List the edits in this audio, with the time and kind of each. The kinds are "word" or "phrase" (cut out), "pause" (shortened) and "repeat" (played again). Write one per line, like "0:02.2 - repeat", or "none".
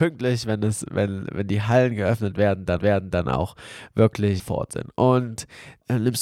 0:02.8 - repeat
0:04.4 - word